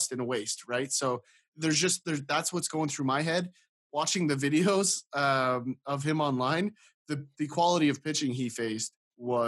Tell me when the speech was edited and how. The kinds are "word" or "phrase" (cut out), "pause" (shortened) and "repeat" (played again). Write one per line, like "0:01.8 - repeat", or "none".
none